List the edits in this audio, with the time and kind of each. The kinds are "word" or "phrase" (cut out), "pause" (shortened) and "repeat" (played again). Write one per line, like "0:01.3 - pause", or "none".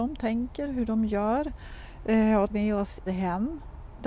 0:02.5 - word
0:03.1 - word